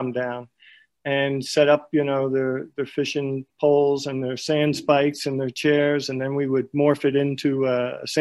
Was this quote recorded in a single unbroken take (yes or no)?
yes